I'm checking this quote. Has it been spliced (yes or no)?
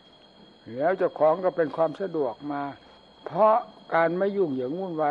yes